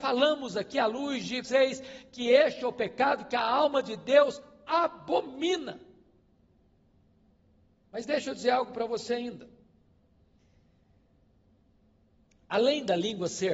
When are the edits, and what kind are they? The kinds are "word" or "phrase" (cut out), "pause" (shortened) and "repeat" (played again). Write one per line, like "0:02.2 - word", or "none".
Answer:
0:01.4 - word